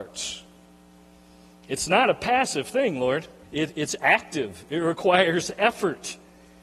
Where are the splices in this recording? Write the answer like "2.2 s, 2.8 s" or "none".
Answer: 3.4 s